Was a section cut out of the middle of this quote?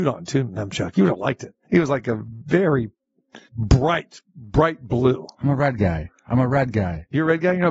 yes; 2 cuts; at 1.6 s, 3.4 s

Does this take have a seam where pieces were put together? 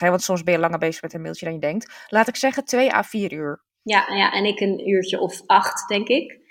no; 0 cuts

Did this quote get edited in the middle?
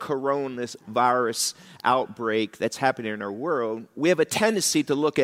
no; 0 cuts

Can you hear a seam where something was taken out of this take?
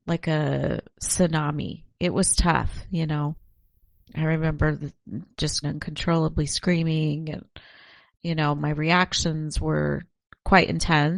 yes; 1 cut; at 5.6 s

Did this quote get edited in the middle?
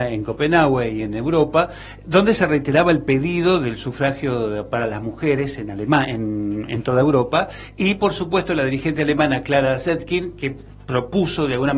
no; 0 cuts

